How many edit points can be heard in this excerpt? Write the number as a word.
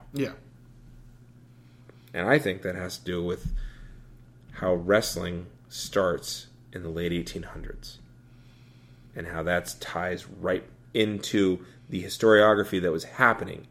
zero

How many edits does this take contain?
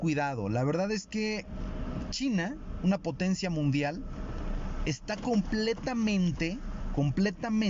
zero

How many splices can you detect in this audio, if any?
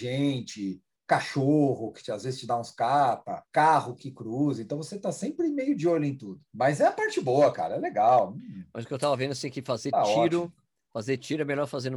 two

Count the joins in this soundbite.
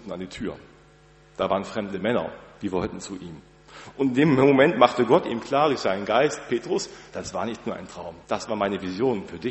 one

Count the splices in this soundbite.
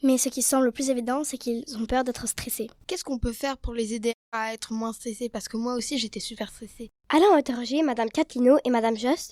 one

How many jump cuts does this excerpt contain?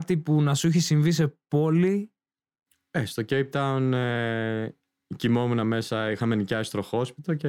zero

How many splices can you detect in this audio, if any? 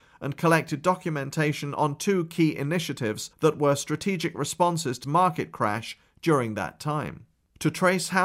two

